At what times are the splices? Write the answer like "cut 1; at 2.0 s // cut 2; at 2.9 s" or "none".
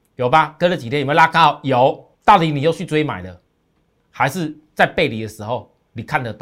cut 1; at 2.1 s